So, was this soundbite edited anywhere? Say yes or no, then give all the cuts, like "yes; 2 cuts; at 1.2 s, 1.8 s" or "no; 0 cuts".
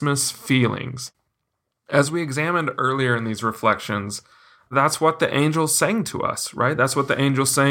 no; 0 cuts